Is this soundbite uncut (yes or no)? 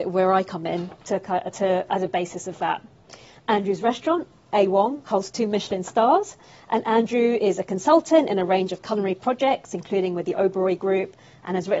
yes